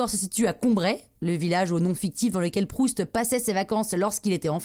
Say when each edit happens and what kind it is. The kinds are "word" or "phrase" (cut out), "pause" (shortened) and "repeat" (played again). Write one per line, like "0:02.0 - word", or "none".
none